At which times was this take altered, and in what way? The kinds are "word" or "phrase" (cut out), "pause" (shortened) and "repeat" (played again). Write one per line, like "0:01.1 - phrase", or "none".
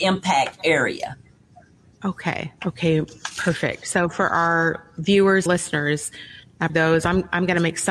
0:02.6 - pause
0:05.5 - word
0:06.7 - word